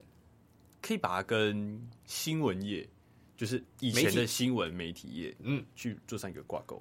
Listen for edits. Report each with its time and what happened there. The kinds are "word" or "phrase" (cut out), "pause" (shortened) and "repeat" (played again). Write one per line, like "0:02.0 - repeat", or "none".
none